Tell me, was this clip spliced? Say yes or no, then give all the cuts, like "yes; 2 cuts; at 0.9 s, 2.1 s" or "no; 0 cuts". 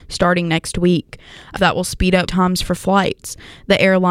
yes; 2 cuts; at 1.6 s, 2.3 s